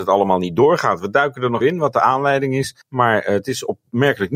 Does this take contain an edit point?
yes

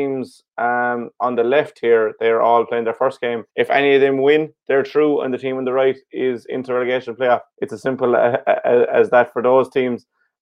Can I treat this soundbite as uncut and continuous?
no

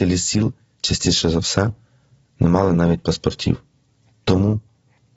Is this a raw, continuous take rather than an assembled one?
yes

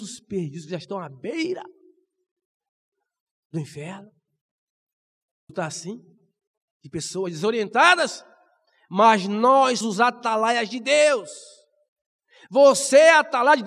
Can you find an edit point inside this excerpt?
yes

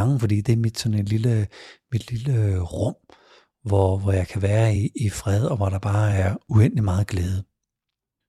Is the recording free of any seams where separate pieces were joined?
yes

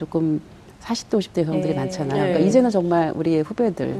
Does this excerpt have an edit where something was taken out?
no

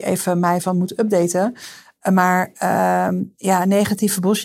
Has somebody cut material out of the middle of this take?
no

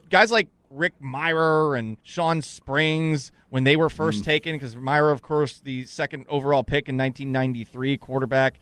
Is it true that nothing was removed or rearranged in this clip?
no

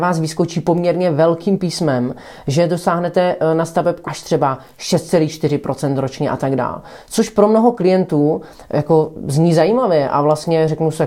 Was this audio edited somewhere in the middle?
yes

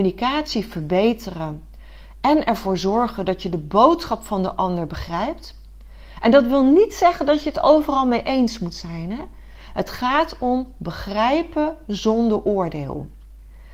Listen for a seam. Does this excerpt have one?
no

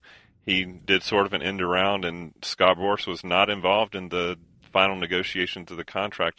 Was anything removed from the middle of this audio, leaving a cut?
no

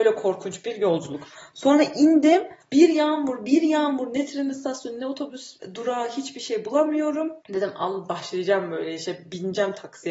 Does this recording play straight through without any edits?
yes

